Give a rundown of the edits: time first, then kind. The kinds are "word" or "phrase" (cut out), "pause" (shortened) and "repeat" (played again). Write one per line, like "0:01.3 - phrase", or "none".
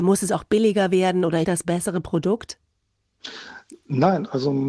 0:01.4 - phrase